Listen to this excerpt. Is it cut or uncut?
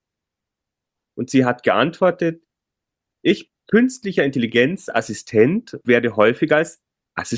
cut